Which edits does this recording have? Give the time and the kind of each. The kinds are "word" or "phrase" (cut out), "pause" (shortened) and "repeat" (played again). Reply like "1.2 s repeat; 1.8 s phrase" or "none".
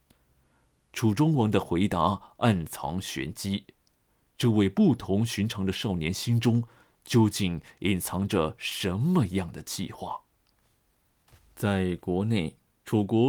none

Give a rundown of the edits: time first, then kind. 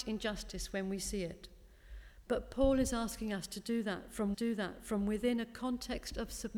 4.3 s repeat

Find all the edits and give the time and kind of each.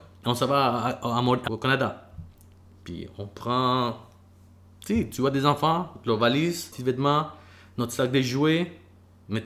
1.5 s word; 6.7 s word

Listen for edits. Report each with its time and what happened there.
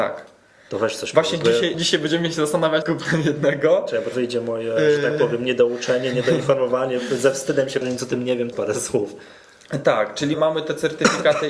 1.7 s word; 2.8 s word; 4.1 s word; 7.8 s word; 8.5 s word; 10.3 s word

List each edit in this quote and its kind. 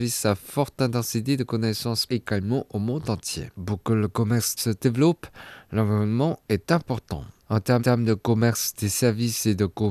2.1 s word; 3.5 s pause; 4.6 s phrase; 7.8 s repeat

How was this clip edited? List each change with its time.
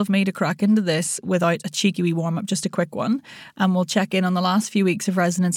none

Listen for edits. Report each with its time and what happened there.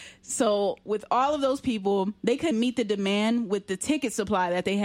2.5 s word

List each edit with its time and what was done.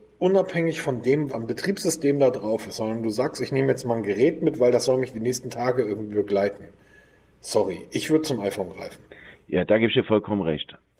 1.3 s word

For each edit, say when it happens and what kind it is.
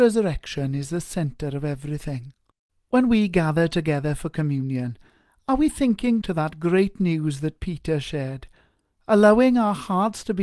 6.2 s word

